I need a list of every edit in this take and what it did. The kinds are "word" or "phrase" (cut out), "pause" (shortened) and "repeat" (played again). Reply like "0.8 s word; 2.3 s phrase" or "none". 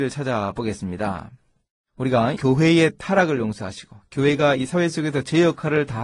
2.4 s word